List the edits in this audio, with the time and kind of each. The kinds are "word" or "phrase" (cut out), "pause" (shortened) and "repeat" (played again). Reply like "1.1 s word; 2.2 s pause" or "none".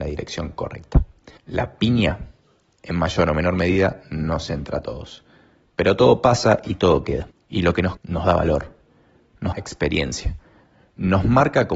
1.4 s pause; 7.3 s pause; 8.0 s word; 9.5 s word